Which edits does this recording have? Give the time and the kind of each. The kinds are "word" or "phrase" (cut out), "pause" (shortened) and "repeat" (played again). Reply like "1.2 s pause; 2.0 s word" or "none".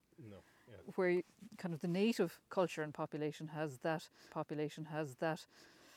2.4 s pause; 4.3 s repeat